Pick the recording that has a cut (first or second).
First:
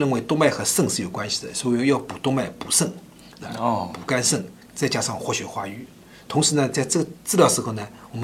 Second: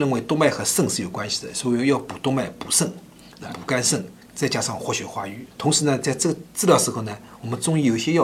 second